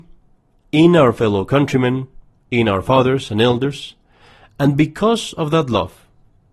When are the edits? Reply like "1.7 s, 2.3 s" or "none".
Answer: none